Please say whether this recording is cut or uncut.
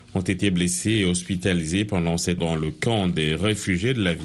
cut